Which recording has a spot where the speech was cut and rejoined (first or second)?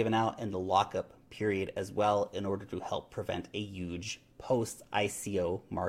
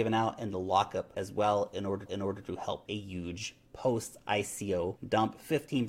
second